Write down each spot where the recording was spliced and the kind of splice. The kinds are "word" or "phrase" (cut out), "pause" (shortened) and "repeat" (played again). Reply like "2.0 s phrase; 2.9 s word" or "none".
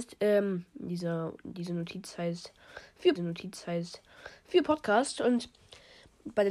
3.2 s repeat